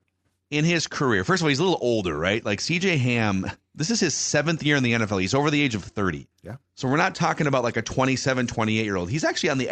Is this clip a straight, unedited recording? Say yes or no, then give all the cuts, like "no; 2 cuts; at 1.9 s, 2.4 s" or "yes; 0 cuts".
no; 1 cut; at 6.3 s